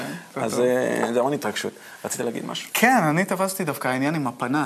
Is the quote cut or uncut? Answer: uncut